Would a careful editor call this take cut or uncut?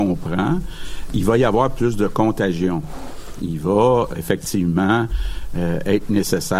cut